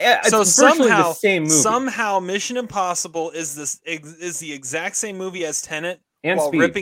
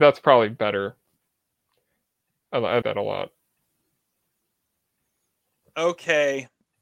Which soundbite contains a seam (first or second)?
second